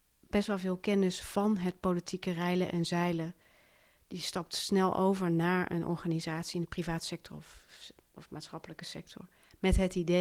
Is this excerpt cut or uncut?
uncut